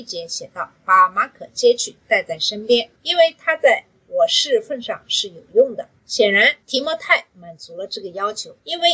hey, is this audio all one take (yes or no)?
no